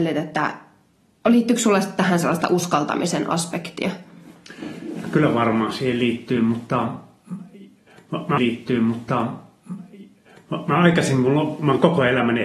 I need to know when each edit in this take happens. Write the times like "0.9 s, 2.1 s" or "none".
8.4 s